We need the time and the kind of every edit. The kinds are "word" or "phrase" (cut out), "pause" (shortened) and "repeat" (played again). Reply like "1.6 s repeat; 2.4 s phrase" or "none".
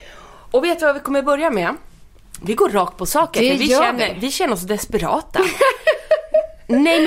none